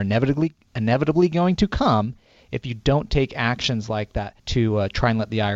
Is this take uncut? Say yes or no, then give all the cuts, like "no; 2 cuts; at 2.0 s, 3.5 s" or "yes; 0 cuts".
no; 1 cut; at 4.4 s